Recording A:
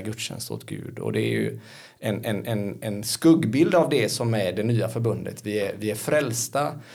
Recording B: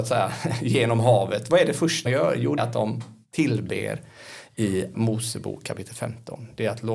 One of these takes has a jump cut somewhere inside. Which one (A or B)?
B